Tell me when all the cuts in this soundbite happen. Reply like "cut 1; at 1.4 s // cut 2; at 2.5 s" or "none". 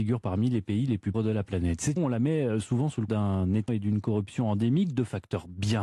cut 1; at 1.1 s // cut 2; at 2.0 s // cut 3; at 3.1 s // cut 4; at 3.7 s